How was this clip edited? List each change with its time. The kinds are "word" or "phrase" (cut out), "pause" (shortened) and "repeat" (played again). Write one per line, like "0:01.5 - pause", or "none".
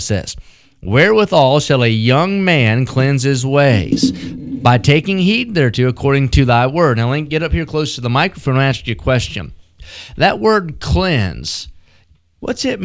none